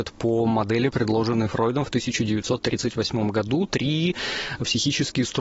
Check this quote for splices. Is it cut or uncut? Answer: uncut